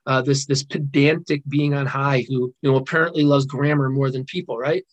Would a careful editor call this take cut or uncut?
cut